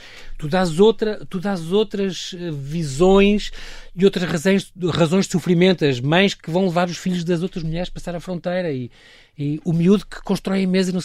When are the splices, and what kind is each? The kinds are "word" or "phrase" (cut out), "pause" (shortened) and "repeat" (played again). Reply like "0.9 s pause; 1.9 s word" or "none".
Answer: none